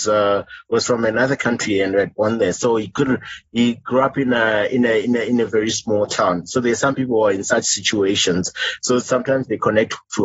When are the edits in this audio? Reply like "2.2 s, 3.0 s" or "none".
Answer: none